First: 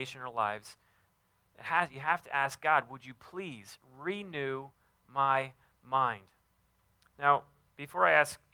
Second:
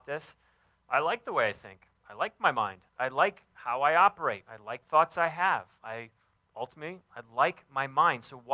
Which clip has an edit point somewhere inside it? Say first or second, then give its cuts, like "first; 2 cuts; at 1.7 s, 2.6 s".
second; 3 cuts; at 2.0 s, 2.9 s, 4.8 s